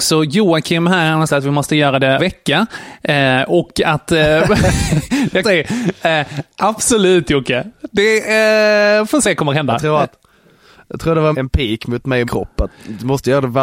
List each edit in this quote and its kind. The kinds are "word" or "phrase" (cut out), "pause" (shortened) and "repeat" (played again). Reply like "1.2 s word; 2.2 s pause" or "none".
1.3 s word; 2.2 s word; 5.4 s word; 9.2 s word; 11.3 s word; 12.2 s word